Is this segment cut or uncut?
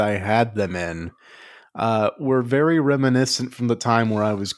uncut